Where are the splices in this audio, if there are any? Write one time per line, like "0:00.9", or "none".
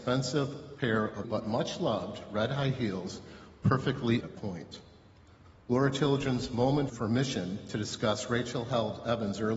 0:01.2
0:04.2
0:06.9